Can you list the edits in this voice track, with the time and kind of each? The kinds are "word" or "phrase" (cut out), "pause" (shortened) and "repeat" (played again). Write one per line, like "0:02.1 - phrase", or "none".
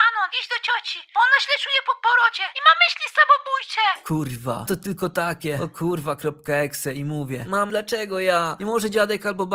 0:01.6 - word
0:04.7 - word
0:07.7 - word